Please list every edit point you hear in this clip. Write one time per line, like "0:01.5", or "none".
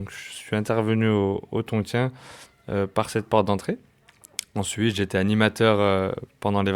none